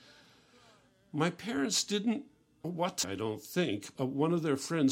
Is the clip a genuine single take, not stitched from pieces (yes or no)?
no